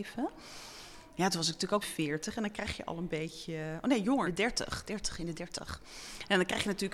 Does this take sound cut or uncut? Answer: cut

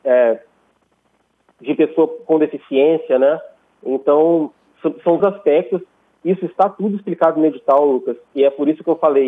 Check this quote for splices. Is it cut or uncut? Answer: cut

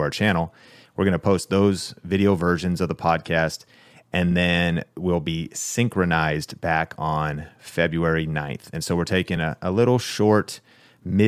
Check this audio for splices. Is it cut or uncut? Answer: uncut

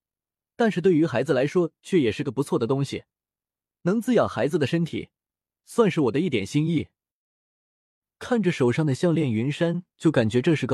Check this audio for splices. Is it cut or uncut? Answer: uncut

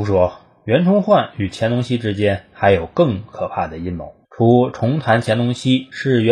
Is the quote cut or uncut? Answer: cut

